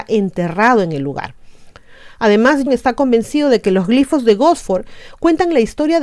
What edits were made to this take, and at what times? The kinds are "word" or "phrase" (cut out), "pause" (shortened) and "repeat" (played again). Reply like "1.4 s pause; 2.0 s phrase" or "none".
2.7 s word